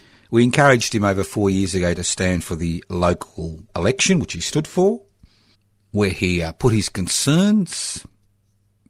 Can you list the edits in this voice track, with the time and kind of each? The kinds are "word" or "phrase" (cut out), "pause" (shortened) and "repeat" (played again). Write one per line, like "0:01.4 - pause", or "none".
0:03.7 - pause
0:05.5 - pause